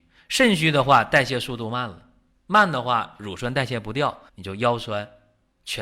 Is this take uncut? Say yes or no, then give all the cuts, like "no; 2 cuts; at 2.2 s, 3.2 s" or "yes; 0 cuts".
no; 1 cut; at 4.3 s